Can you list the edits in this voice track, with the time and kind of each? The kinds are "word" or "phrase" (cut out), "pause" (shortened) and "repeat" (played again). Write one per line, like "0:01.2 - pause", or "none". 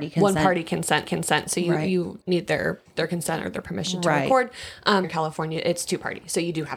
0:01.0 - repeat
0:02.2 - word
0:02.8 - word
0:05.0 - word